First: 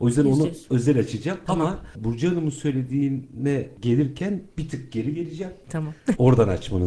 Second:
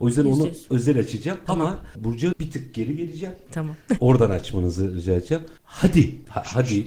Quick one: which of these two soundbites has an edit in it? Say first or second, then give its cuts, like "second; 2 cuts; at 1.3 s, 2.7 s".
second; 1 cut; at 2.3 s